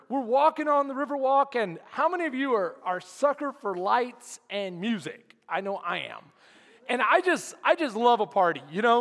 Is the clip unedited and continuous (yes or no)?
yes